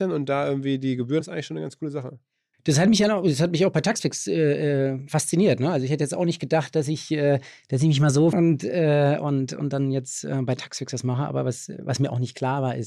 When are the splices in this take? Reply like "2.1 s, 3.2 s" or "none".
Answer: 1.2 s, 8.3 s